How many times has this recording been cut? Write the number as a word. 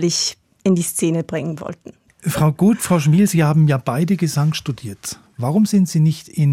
zero